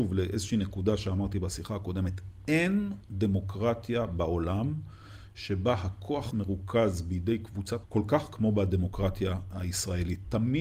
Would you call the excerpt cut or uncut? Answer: cut